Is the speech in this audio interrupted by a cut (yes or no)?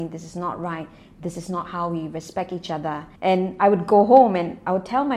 yes